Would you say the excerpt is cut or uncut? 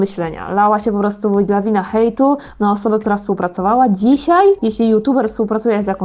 uncut